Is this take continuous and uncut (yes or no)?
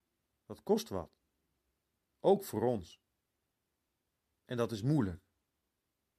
yes